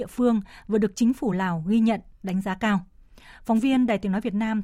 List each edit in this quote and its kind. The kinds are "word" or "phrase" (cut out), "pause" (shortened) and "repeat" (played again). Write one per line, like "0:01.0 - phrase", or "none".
none